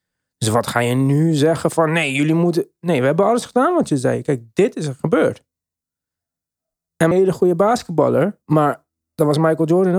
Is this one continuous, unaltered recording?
no; 2 cuts; at 7.1 s, 8.4 s

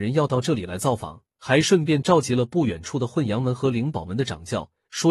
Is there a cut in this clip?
yes; 1 cut; at 1.3 s

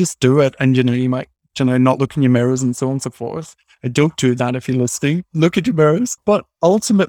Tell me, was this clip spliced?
no; 0 cuts

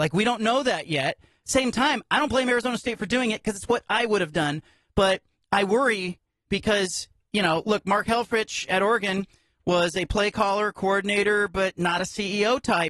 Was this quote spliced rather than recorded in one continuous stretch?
no; 0 cuts

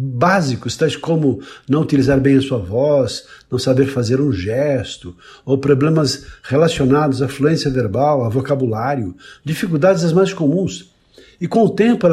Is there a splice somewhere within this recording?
no; 0 cuts

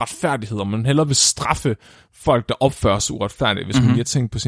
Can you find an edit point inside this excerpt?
no; 0 cuts

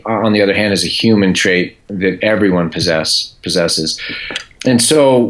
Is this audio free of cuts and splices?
yes; 0 cuts

